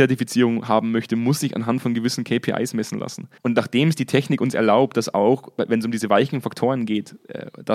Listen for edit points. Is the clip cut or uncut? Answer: cut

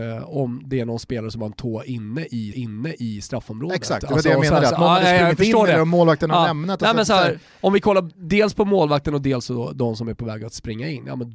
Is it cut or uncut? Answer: cut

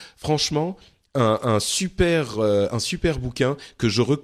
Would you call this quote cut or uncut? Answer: uncut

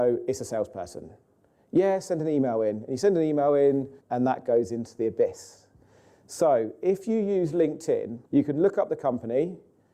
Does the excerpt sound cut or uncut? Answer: cut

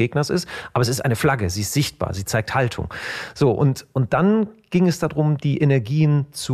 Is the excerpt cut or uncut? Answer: uncut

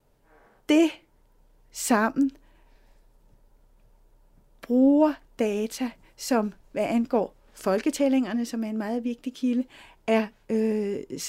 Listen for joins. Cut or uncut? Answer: uncut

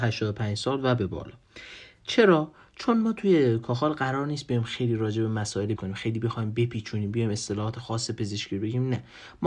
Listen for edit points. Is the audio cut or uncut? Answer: cut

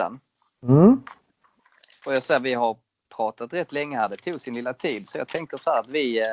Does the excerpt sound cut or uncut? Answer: uncut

